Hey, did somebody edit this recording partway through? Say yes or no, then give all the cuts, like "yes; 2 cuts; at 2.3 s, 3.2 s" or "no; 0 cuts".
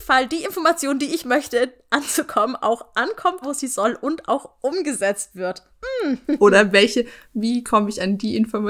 yes; 1 cut; at 3.4 s